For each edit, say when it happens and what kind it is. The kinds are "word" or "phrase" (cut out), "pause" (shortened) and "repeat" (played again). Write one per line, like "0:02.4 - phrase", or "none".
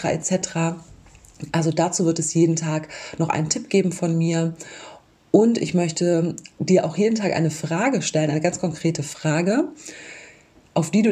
none